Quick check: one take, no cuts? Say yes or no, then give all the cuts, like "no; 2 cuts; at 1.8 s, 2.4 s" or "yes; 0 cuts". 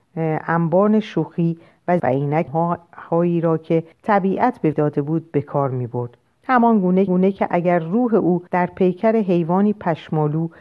no; 7 cuts; at 2.0 s, 2.5 s, 3.9 s, 4.7 s, 6.2 s, 7.1 s, 8.5 s